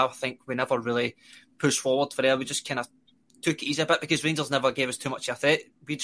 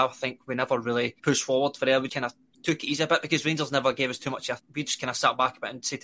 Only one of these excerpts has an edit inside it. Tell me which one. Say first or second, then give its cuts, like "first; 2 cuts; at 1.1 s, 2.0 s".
second; 4 cuts; at 1.2 s, 2.1 s, 2.5 s, 4.6 s